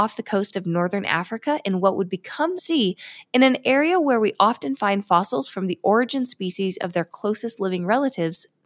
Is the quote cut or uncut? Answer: cut